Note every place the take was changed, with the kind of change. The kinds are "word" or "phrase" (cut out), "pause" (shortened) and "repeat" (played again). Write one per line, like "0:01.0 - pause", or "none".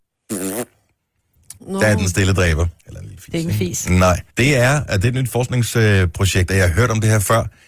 0:01.6 - pause
0:02.8 - pause
0:04.3 - pause